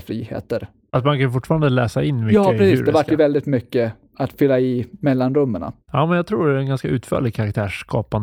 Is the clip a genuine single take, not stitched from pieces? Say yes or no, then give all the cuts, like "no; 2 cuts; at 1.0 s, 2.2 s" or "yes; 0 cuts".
no; 1 cut; at 5.8 s